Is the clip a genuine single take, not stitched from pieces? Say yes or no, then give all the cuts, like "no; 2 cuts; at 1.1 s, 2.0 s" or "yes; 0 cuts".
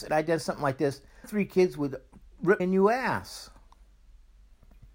no; 2 cuts; at 1.2 s, 2.6 s